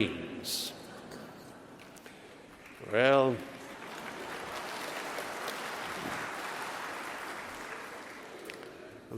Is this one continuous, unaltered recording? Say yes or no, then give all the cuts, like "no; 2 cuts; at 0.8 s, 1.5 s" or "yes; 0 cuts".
yes; 0 cuts